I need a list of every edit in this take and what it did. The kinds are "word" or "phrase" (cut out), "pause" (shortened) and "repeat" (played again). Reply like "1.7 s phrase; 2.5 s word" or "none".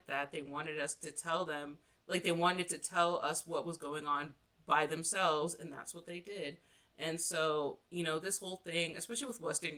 none